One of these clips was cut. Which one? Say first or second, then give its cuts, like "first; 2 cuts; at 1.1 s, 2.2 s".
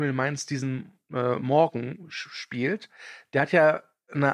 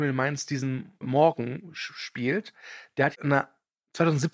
second; 2 cuts; at 1.0 s, 3.1 s